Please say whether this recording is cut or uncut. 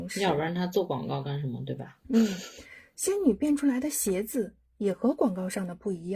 uncut